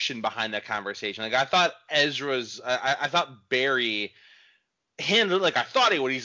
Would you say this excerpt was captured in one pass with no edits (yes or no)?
yes